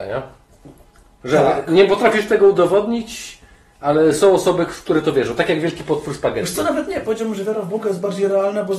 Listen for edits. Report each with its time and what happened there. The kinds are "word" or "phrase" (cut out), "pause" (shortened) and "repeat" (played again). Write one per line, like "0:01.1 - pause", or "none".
none